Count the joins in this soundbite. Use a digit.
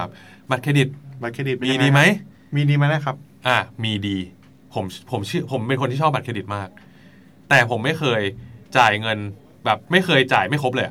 2